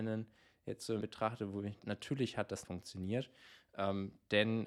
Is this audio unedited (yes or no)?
no